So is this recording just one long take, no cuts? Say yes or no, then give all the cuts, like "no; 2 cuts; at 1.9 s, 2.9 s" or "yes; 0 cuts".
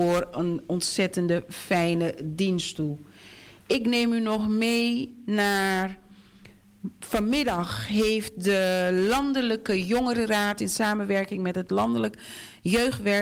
yes; 0 cuts